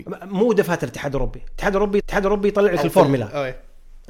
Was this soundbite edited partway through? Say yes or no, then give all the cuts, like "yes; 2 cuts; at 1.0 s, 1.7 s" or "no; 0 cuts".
yes; 1 cut; at 2.0 s